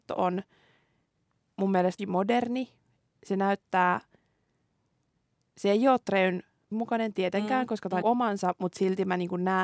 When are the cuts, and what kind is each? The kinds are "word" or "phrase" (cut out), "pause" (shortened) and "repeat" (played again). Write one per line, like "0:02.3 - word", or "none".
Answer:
0:02.0 - word
0:06.7 - word
0:08.0 - word